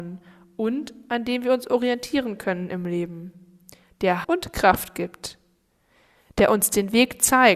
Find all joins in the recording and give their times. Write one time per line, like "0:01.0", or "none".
0:04.2